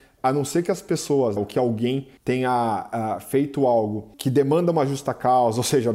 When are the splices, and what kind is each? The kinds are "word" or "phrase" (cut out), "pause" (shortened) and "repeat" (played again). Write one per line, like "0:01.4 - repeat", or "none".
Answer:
0:01.4 - word
0:02.2 - pause
0:04.1 - pause